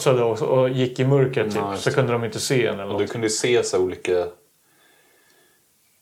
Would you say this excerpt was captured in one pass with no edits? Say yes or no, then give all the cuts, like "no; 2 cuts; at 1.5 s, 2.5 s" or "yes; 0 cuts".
yes; 0 cuts